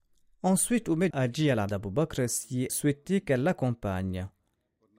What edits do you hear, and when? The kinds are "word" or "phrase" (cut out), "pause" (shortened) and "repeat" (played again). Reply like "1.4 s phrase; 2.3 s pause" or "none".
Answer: 1.1 s word; 1.7 s word; 2.7 s word